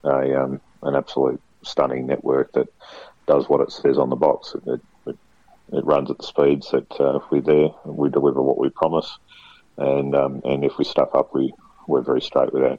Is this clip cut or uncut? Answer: uncut